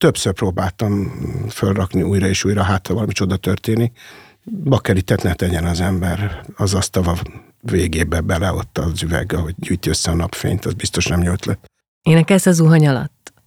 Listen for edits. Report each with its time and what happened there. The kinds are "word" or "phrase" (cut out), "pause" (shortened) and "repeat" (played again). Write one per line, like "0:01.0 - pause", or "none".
none

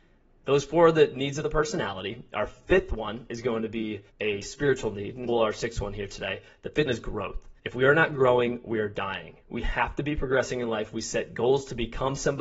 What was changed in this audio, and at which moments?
0:04.1 - pause
0:05.3 - word
0:06.9 - word
0:07.6 - pause
0:09.4 - pause

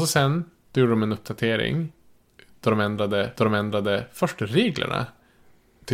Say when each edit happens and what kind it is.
0:03.4 - repeat

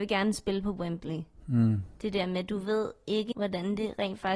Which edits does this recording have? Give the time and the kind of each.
0:03.3 - word

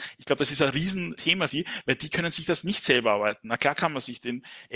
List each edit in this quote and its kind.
0:01.2 - word
0:01.5 - word

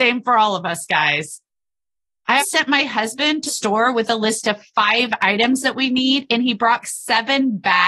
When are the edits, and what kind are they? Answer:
0:02.4 - word
0:03.5 - word
0:06.8 - word

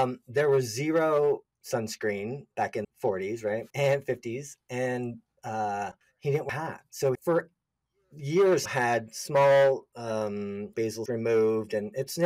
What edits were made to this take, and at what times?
0:02.8 - word
0:03.7 - pause
0:06.0 - pause
0:06.5 - word
0:07.1 - word
0:08.7 - word
0:10.7 - word
0:11.1 - word

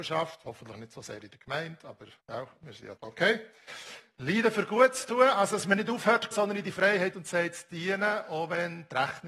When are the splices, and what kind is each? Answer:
0:02.2 - pause
0:03.0 - word
0:06.3 - phrase
0:07.1 - word

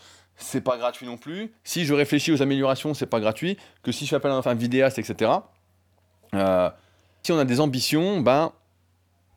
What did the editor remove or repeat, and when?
0:04.4 - word
0:07.2 - phrase

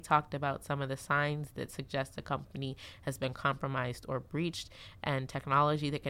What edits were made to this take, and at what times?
none

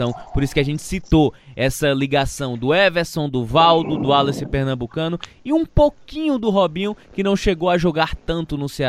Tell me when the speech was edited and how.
none

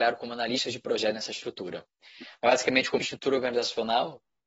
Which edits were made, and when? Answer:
0:03.0 - word

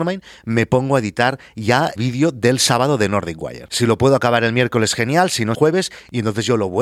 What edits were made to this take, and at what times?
0:02.0 - word
0:05.5 - phrase

